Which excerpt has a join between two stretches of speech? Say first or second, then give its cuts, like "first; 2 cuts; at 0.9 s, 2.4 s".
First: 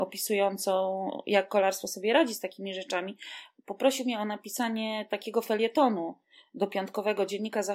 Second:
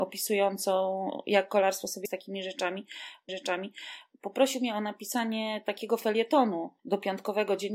second; 3 cuts; at 2.0 s, 3.3 s, 6.8 s